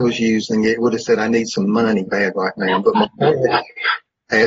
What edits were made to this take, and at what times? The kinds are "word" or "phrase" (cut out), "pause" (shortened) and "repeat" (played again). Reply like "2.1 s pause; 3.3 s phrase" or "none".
2.1 s word